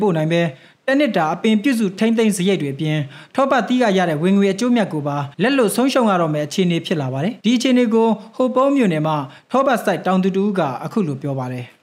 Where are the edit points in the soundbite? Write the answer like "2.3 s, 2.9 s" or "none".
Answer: 5.3 s, 7.4 s